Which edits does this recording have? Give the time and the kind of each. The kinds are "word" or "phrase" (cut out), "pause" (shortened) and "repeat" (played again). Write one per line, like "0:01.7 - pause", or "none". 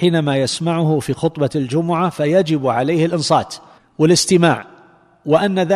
0:03.8 - pause